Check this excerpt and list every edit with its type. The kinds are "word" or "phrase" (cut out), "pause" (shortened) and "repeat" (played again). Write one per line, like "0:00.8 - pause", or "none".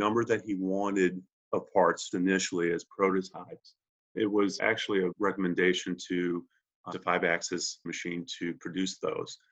0:02.1 - word
0:04.2 - word
0:04.6 - word
0:05.1 - word
0:06.9 - word
0:07.9 - word